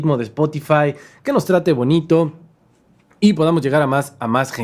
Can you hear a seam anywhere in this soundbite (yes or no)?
no